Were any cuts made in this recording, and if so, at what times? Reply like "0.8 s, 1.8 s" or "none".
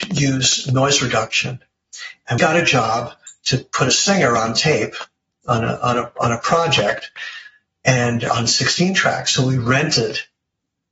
2.4 s